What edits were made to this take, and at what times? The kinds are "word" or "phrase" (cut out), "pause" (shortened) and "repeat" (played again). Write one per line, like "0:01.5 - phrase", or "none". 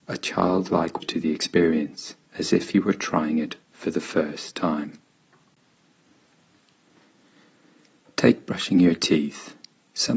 0:01.0 - word
0:02.2 - pause